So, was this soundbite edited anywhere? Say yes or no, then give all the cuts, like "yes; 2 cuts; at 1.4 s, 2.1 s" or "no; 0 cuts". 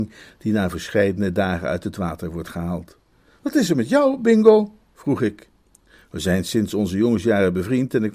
yes; 1 cut; at 3.1 s